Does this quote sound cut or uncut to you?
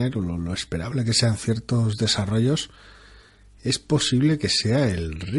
uncut